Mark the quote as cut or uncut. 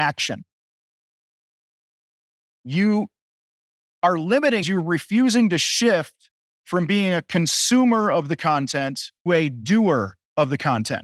cut